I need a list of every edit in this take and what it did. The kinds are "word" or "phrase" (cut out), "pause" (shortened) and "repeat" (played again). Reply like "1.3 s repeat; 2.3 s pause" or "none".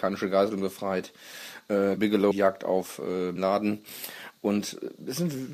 2.0 s word; 2.3 s phrase; 3.4 s word